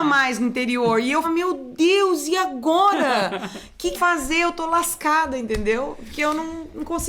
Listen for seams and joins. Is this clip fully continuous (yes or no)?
no